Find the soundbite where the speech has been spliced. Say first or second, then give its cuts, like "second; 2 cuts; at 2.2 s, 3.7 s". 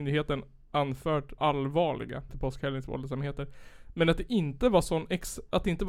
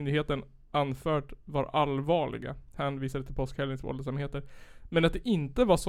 first; 2 cuts; at 1.4 s, 2.3 s